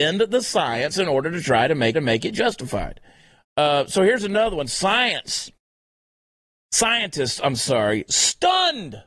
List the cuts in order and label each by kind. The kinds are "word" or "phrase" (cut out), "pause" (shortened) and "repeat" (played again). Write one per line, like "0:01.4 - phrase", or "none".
0:01.9 - repeat

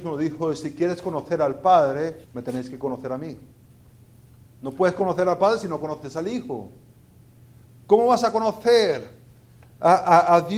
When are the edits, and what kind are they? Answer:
0:02.2 - pause

